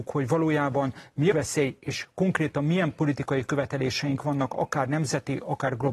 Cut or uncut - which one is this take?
cut